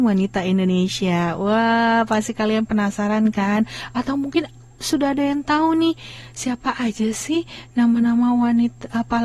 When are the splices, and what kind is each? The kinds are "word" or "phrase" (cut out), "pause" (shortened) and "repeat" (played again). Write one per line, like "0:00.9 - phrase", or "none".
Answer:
none